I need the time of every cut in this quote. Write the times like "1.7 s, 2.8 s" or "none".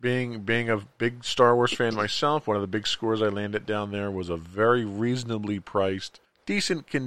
none